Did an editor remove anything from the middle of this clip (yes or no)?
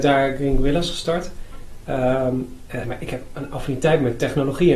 yes